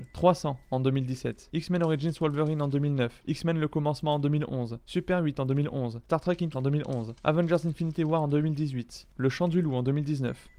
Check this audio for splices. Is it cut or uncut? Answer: cut